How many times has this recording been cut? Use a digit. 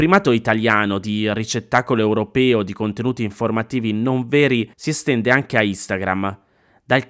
1